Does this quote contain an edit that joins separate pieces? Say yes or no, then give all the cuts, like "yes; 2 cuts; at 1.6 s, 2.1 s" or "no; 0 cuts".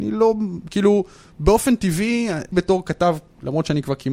yes; 1 cut; at 2.5 s